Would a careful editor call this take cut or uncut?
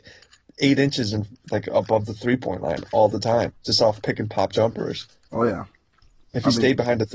uncut